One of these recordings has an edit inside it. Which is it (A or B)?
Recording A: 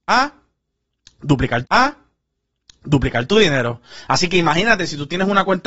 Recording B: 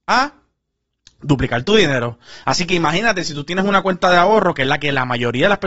A